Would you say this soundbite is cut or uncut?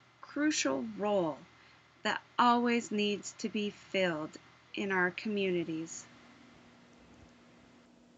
uncut